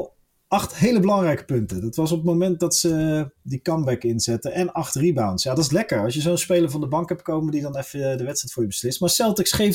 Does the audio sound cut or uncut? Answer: uncut